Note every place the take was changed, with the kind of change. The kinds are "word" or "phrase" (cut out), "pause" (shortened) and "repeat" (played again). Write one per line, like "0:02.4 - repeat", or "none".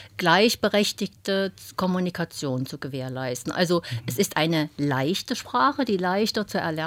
none